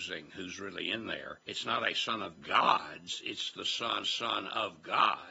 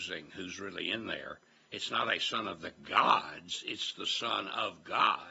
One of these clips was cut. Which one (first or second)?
first